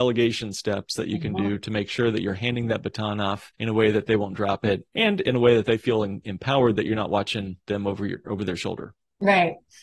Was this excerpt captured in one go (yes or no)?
no